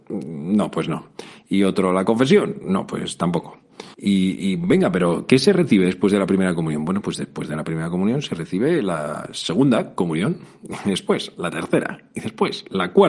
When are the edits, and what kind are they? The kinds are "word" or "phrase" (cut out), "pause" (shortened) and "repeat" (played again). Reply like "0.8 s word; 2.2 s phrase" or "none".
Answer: 3.9 s pause